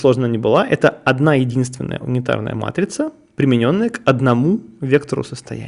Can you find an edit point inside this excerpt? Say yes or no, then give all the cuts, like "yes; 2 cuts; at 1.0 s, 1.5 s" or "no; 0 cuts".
no; 0 cuts